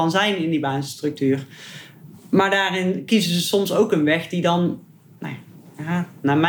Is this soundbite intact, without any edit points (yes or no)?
yes